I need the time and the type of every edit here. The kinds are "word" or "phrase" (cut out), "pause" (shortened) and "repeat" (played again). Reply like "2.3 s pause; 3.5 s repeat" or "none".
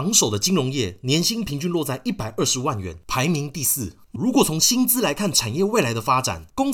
4.2 s word